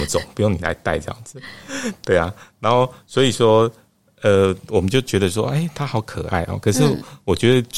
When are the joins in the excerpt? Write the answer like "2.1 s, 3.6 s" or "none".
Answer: none